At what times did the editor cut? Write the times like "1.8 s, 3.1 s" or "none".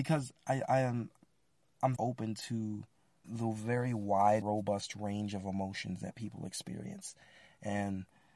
2.0 s, 3.2 s, 4.4 s